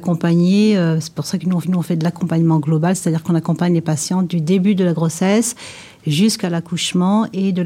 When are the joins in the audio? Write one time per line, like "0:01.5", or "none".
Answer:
0:01.6